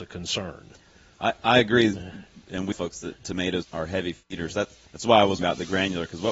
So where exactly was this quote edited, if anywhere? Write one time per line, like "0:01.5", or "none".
0:02.7
0:03.6
0:04.9
0:05.4